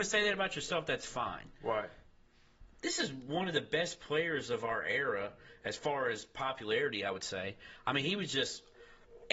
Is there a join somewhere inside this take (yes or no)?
no